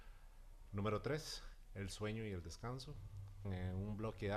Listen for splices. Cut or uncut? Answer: cut